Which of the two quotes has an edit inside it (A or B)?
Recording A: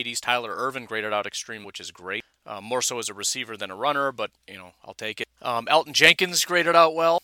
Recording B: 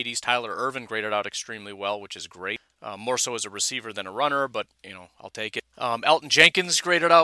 A